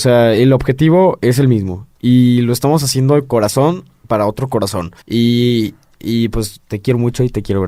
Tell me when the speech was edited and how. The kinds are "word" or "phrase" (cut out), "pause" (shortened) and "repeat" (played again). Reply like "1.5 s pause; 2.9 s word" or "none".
5.0 s pause